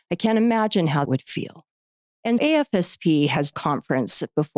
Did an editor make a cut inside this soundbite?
yes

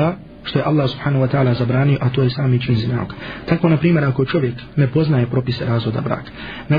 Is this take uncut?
yes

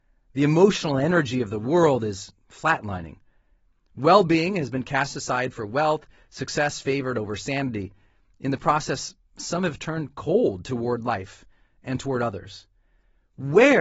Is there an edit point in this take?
no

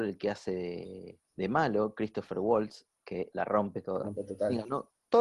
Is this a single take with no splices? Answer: no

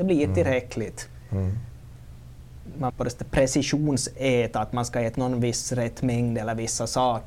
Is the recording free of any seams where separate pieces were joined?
no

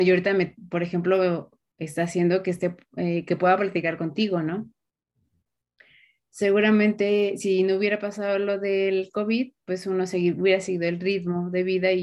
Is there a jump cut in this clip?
no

